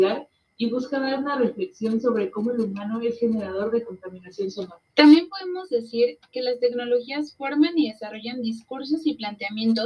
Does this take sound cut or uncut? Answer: cut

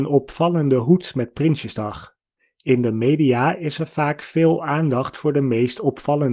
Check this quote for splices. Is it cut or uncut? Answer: cut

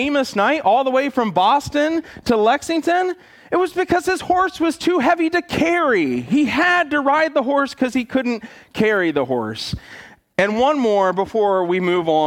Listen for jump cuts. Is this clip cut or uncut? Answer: uncut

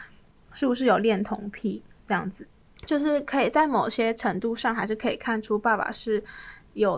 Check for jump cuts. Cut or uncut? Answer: cut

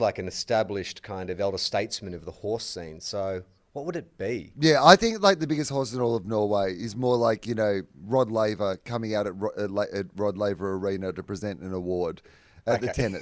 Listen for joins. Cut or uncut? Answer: uncut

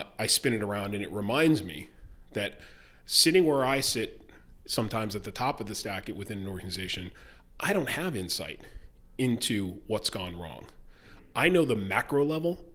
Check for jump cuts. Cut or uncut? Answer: uncut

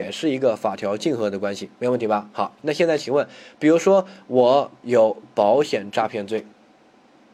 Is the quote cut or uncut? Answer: cut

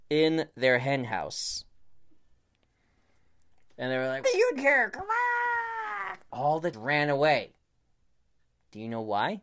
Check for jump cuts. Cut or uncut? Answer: cut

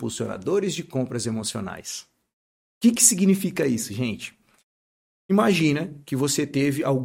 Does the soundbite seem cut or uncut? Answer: uncut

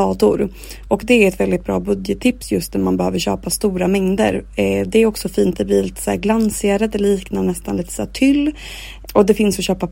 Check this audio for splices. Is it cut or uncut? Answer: uncut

